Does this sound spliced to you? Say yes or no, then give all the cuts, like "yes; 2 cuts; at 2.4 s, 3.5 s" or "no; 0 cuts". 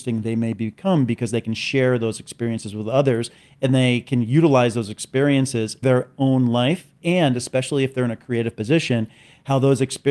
yes; 1 cut; at 5.8 s